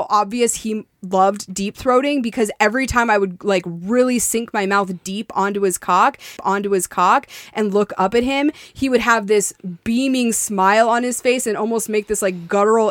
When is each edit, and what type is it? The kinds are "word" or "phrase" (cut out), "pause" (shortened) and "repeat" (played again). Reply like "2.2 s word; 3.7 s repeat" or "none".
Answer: 6.4 s repeat